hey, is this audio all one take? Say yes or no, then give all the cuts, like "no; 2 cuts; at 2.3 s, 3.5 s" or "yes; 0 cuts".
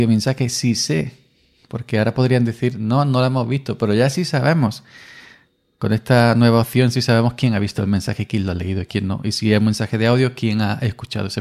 yes; 0 cuts